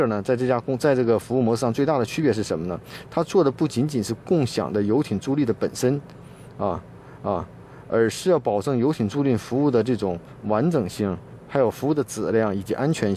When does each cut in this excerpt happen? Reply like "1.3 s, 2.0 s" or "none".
7.2 s